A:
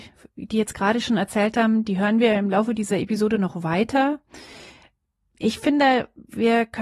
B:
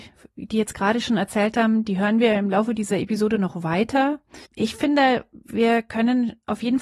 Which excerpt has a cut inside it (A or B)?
B